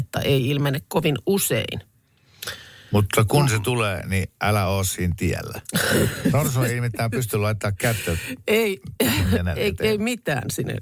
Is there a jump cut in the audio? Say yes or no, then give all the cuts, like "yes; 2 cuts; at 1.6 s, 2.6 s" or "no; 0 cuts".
no; 0 cuts